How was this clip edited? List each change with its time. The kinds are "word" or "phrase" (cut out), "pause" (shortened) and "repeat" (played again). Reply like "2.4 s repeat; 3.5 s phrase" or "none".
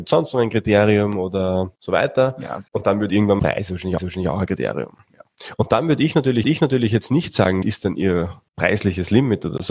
1.8 s pause; 2.7 s pause; 3.4 s phrase; 4.0 s repeat; 6.4 s repeat; 7.6 s word; 8.5 s pause